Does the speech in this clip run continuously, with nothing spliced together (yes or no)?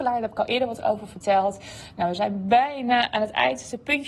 yes